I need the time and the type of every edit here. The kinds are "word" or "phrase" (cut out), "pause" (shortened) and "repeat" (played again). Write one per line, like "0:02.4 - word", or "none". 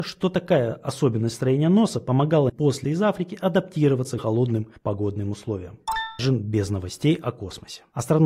0:02.5 - word
0:02.8 - word
0:04.2 - word
0:06.2 - word